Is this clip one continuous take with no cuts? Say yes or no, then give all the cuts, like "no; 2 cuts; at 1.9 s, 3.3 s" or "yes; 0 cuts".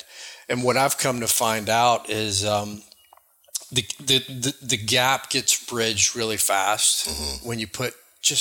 yes; 0 cuts